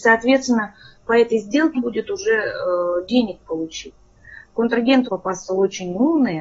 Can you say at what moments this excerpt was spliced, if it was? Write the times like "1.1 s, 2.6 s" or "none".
1.8 s, 3.4 s, 5.1 s